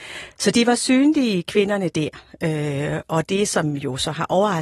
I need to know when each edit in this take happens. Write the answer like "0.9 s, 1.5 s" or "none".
none